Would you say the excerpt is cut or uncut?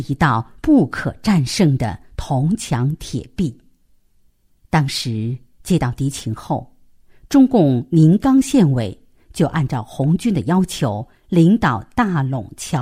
uncut